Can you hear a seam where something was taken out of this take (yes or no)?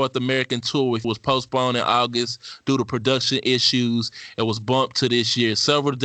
yes